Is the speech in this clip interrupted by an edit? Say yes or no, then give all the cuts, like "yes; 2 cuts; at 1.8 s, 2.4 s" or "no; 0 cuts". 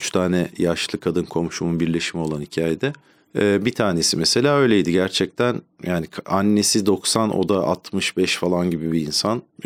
no; 0 cuts